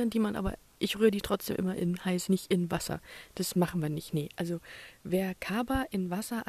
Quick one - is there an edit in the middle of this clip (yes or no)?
yes